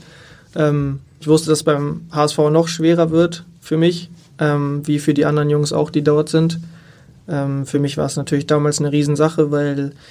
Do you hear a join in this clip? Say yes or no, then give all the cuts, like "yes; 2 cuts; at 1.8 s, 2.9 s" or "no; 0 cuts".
no; 0 cuts